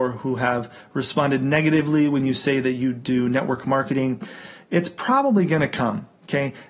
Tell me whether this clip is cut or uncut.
uncut